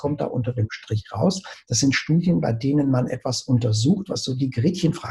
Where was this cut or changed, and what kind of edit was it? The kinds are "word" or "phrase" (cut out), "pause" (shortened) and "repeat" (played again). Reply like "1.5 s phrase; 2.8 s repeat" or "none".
none

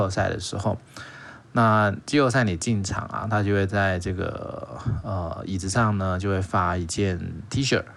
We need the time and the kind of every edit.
none

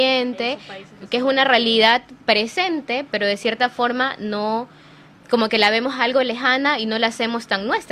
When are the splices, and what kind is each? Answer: none

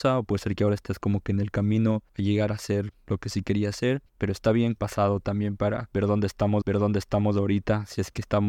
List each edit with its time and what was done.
2.1 s pause; 4.1 s pause; 4.8 s phrase; 6.6 s repeat

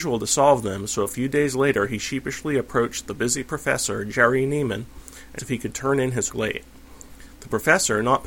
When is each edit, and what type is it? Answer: 5.4 s word; 6.3 s word

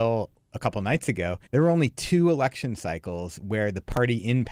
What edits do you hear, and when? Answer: 1.5 s pause

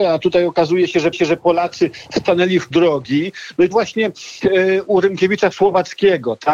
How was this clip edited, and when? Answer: 1.1 s repeat; 2.7 s word; 3.7 s word; 4.4 s word; 5.5 s word

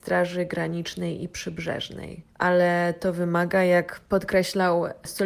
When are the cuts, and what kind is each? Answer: 2.3 s pause

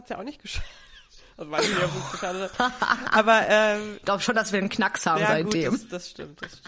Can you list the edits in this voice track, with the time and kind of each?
4.7 s word

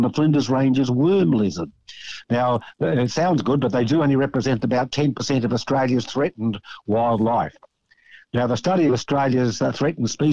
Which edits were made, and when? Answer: none

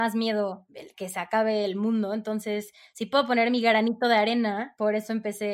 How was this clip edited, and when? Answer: 0.9 s word

